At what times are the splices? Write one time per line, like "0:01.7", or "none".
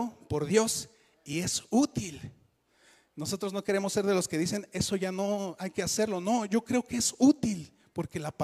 none